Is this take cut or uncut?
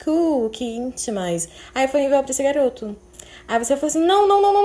uncut